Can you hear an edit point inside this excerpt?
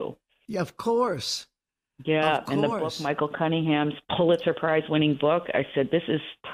no; 0 cuts

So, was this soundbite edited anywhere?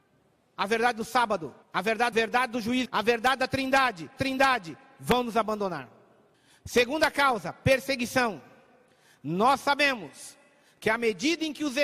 yes; 5 cuts; at 1.6 s, 2.1 s, 2.9 s, 4.2 s, 6.3 s

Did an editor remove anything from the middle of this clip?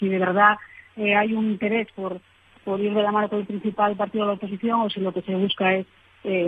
no; 0 cuts

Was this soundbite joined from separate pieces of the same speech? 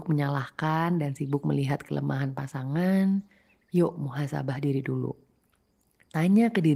no; 0 cuts

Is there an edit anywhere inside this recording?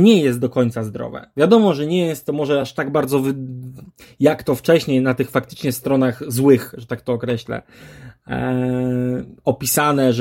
no; 0 cuts

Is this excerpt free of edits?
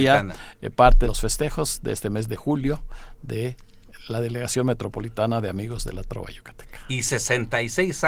no; 1 cut; at 1.0 s

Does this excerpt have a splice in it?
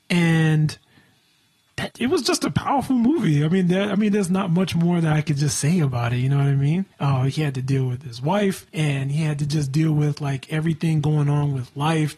yes; 3 cuts; at 1.9 s, 6.9 s, 8.7 s

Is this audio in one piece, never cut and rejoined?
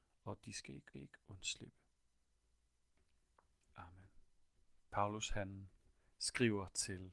no; 2 cuts; at 0.9 s, 4.8 s

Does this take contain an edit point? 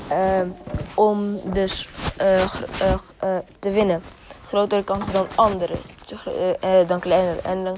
no; 0 cuts

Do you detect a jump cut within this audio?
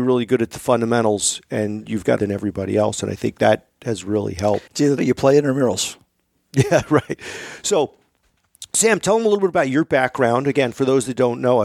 yes; 3 cuts; at 2.2 s, 4.7 s, 5.0 s

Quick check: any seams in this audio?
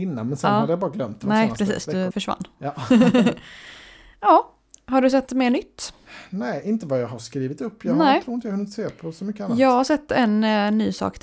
yes; 2 cuts; at 2.1 s, 5.3 s

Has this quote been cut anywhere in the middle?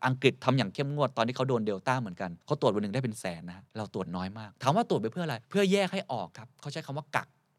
yes; 3 cuts; at 2.4 s, 3.7 s, 5.4 s

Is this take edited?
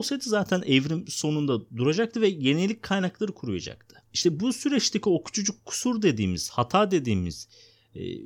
yes; 1 cut; at 4.0 s

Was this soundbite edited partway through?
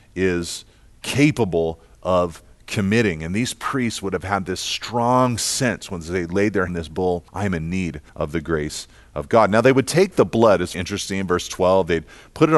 yes; 4 cuts; at 6.7 s, 7.3 s, 8.1 s, 10.7 s

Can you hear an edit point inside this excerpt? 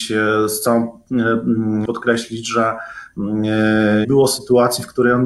yes; 2 cuts; at 1.9 s, 4.0 s

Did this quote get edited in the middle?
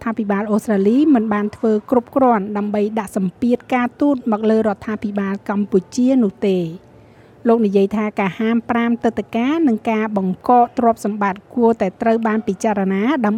no; 0 cuts

